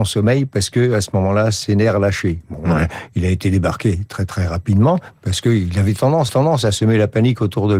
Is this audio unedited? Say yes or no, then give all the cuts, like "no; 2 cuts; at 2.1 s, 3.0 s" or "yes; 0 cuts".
no; 1 cut; at 6.3 s